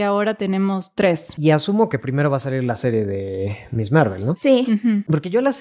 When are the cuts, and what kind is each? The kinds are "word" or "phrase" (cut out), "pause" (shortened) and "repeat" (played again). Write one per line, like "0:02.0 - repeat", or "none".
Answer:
none